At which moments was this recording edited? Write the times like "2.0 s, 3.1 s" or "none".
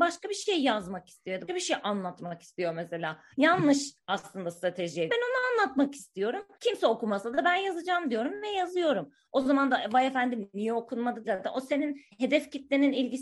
1.5 s, 3.3 s, 5.1 s, 6.5 s, 11.2 s, 12.1 s